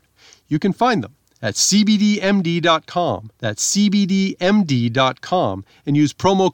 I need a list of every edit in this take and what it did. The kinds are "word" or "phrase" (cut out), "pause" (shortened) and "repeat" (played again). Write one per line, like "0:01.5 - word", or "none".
0:03.4 - pause